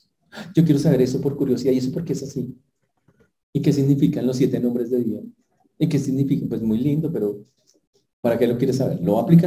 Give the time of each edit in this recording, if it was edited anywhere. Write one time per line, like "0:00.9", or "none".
none